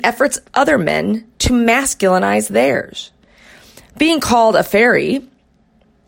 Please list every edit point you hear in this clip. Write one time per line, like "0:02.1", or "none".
none